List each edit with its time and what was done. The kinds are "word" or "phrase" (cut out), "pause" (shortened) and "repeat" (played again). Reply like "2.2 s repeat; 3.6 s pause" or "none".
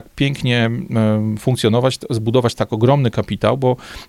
none